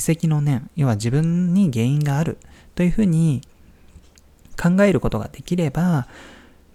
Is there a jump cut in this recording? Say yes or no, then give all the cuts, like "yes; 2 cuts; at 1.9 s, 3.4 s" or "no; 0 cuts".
no; 0 cuts